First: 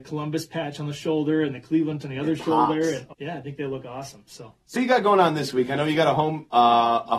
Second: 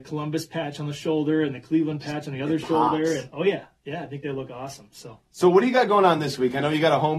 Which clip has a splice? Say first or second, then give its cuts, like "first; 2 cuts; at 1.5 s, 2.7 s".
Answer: first; 3 cuts; at 2.0 s, 3.1 s, 4.8 s